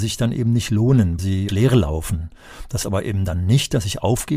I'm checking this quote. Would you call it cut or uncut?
cut